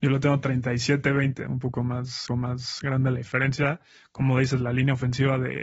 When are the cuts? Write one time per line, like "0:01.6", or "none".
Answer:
0:02.3